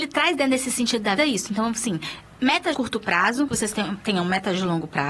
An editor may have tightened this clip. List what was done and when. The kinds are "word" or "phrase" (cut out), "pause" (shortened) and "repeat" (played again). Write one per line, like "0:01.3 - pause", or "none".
0:01.2 - word
0:02.7 - word
0:03.5 - word